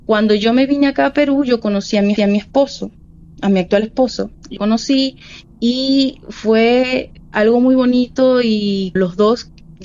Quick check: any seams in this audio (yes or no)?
yes